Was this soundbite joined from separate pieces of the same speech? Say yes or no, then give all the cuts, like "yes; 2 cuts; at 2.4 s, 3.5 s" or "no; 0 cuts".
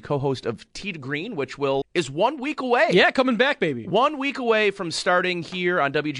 yes; 1 cut; at 1.8 s